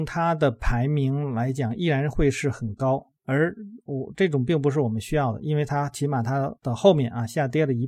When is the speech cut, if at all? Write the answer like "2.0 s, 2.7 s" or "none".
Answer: 6.6 s